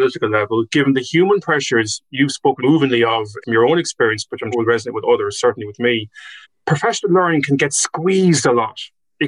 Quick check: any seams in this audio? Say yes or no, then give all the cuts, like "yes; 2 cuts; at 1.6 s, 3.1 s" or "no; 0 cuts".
yes; 4 cuts; at 2.6 s, 3.4 s, 4.5 s, 6.4 s